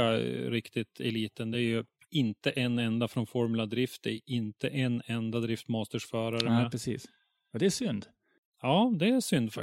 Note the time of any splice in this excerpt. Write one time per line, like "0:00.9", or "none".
none